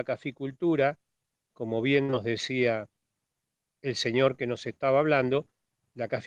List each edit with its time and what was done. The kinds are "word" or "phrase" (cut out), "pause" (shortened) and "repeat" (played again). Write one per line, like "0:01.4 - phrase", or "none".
none